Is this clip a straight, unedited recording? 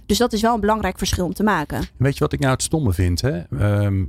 yes; 0 cuts

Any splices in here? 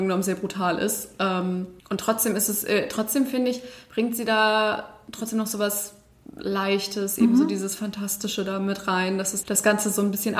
yes; 2 cuts; at 1.8 s, 9.4 s

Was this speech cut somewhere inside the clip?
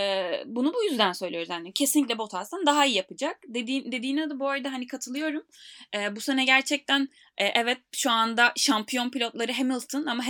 no; 0 cuts

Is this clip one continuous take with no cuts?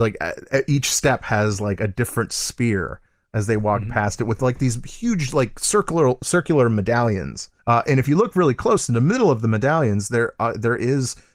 no; 1 cut; at 7.6 s

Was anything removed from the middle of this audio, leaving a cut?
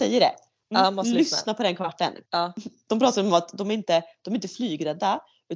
yes; 1 cut; at 2.3 s

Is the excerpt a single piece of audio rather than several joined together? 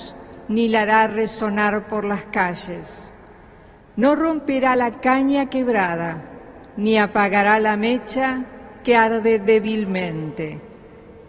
yes; 0 cuts

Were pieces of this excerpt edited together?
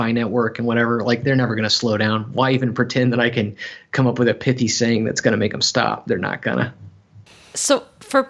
no; 0 cuts

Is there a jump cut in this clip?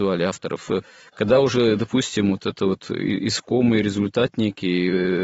no; 0 cuts

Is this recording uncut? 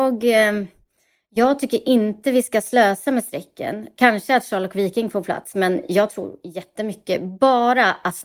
yes; 0 cuts

